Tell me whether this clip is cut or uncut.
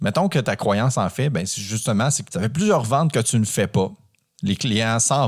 cut